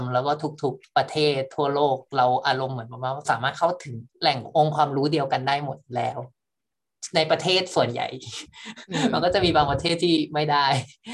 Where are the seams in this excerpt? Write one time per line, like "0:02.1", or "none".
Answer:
0:04.1